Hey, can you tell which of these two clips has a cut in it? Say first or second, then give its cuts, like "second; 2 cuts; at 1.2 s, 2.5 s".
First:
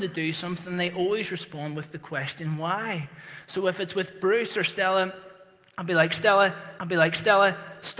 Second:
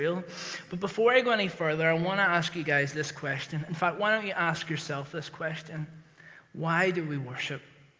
first; 1 cut; at 6.8 s